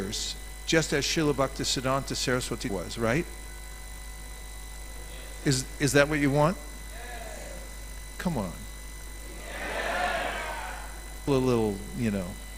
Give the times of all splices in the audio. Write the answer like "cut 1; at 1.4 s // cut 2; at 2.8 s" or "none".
cut 1; at 2.7 s // cut 2; at 11.3 s